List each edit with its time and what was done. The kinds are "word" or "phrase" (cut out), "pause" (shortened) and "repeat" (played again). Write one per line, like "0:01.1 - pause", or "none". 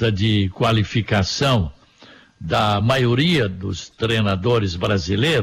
none